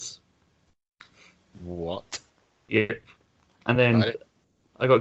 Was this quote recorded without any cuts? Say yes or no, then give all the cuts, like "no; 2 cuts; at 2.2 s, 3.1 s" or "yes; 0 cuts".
yes; 0 cuts